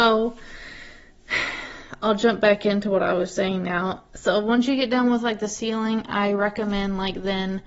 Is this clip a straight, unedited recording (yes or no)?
yes